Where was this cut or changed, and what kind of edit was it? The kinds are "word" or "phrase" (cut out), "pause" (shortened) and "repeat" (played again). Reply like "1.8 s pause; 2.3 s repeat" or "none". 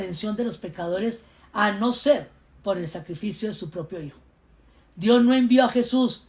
none